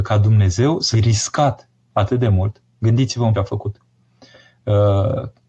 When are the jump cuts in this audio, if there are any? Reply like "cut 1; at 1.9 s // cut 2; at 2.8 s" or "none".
cut 1; at 0.9 s // cut 2; at 3.3 s